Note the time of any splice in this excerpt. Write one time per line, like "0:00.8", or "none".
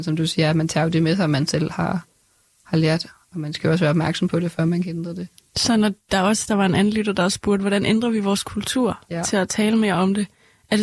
none